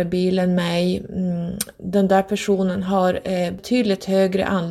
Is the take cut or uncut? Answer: uncut